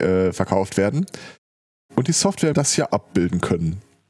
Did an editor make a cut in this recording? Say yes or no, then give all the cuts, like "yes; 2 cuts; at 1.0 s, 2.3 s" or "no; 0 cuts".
yes; 2 cuts; at 2.5 s, 2.9 s